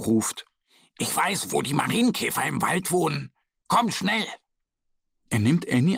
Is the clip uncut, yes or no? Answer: yes